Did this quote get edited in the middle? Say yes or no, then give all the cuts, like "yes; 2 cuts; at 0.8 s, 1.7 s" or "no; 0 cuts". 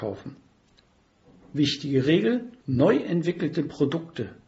yes; 1 cut; at 2.6 s